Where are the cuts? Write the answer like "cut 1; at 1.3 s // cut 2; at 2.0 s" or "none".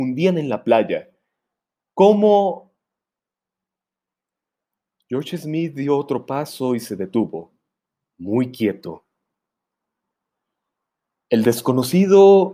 none